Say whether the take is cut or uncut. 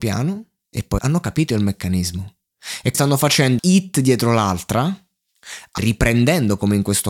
cut